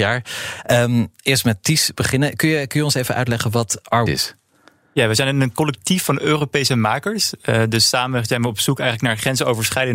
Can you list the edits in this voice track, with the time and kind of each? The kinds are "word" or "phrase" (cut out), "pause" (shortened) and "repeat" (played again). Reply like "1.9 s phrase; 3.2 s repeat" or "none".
4.1 s phrase